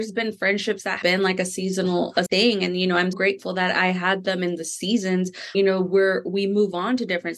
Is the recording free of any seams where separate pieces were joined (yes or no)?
no